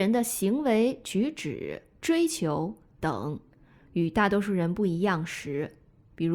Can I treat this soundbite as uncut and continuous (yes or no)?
yes